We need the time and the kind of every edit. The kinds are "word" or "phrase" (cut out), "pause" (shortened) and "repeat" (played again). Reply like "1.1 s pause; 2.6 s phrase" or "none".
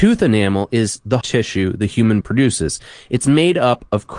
1.2 s word; 2.2 s word